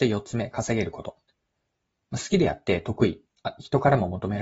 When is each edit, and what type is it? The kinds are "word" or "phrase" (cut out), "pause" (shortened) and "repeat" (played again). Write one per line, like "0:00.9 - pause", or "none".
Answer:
none